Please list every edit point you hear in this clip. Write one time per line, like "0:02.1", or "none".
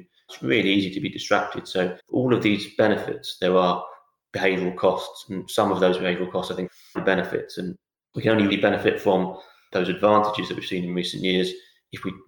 0:02.0
0:07.0
0:08.5